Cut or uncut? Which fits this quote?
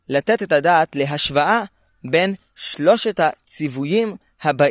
uncut